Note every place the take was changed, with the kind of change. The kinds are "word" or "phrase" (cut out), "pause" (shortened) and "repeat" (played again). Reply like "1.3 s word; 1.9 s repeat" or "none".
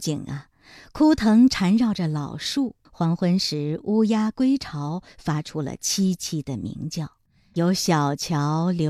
2.8 s pause; 7.3 s pause